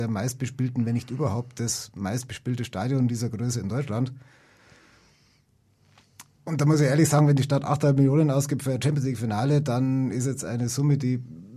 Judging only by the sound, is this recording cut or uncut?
uncut